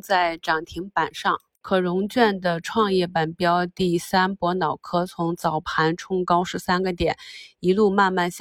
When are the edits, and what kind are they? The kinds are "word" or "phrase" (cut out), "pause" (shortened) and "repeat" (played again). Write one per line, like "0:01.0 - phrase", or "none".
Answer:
none